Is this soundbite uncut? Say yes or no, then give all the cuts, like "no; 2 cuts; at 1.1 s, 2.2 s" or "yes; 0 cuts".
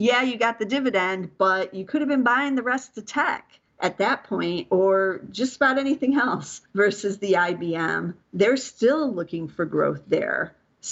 no; 3 cuts; at 3.7 s, 6.7 s, 8.2 s